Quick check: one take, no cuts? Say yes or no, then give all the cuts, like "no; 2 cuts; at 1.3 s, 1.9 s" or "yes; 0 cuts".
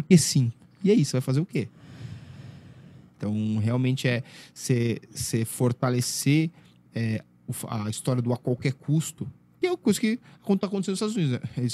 yes; 0 cuts